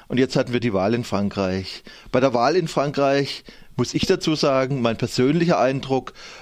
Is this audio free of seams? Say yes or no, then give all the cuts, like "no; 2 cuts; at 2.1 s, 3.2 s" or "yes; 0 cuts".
yes; 0 cuts